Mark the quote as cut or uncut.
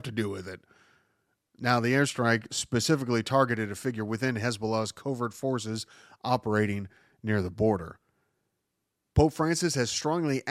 uncut